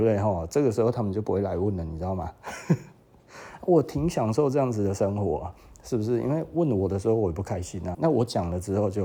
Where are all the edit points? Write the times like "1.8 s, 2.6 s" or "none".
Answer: 7.9 s

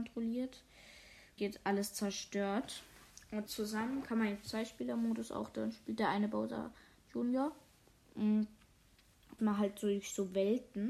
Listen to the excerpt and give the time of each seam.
1.4 s, 3.5 s, 9.4 s

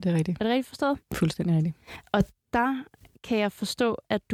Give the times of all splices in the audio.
none

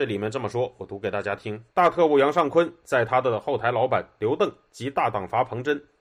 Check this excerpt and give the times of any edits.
1.7 s

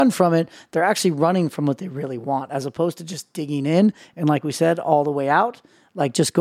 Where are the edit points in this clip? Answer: none

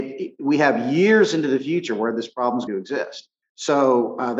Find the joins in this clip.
2.7 s, 3.4 s

